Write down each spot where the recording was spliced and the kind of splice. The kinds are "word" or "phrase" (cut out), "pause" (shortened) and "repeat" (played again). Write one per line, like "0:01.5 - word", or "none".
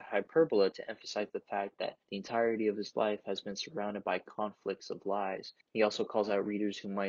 0:02.0 - pause
0:05.6 - pause

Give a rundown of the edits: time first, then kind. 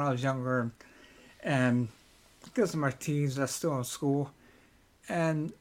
none

